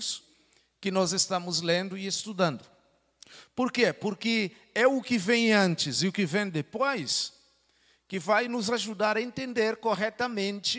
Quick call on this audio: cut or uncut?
uncut